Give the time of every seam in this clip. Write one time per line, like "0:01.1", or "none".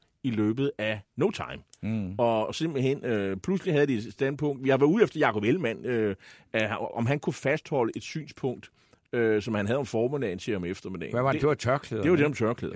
none